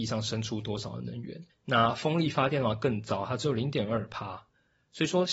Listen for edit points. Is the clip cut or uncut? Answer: cut